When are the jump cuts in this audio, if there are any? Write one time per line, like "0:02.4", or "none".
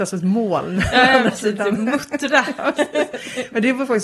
none